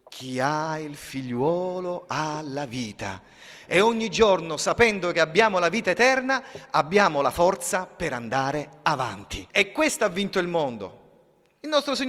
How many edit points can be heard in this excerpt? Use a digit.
1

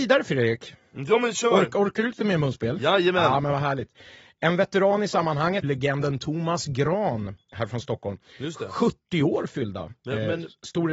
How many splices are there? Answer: 1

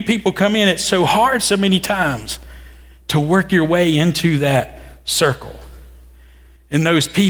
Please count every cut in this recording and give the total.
0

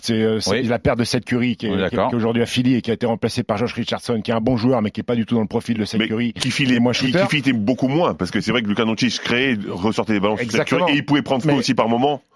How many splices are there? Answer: 0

